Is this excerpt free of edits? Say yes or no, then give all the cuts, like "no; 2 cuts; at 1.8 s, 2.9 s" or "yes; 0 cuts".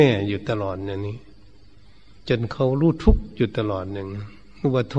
no; 1 cut; at 2.2 s